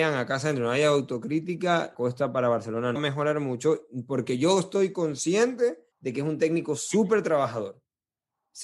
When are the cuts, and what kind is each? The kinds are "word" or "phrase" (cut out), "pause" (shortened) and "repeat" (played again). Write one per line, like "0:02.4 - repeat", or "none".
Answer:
0:01.9 - word
0:03.0 - phrase
0:05.9 - pause